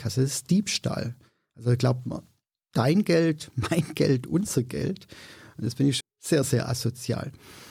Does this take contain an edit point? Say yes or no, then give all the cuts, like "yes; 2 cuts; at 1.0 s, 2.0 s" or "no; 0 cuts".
yes; 1 cut; at 6.0 s